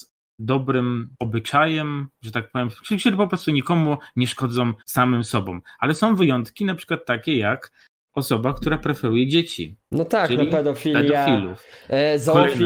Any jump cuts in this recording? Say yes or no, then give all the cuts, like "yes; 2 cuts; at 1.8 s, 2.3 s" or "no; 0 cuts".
yes; 3 cuts; at 1.1 s, 4.8 s, 8.0 s